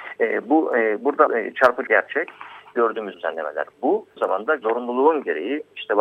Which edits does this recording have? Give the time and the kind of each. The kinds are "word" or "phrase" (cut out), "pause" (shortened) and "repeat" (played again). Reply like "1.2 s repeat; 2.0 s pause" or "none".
1.3 s word; 1.9 s word; 3.1 s phrase; 4.2 s word; 4.6 s word